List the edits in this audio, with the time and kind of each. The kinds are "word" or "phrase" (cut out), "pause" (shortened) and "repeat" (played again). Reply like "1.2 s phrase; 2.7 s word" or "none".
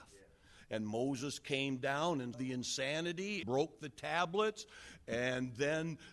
2.3 s word; 3.4 s word